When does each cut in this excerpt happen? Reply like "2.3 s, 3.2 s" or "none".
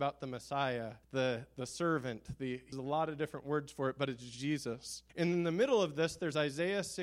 1.0 s, 2.7 s, 5.1 s